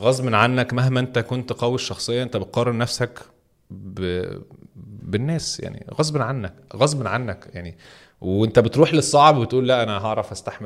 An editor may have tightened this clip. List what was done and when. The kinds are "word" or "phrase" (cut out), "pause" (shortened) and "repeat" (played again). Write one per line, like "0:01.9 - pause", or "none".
none